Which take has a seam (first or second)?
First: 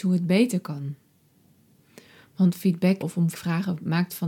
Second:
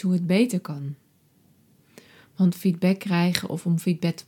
first